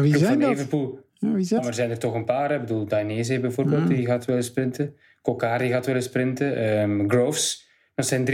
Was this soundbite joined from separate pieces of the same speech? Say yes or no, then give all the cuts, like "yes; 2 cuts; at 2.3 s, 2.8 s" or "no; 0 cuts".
yes; 1 cut; at 1.6 s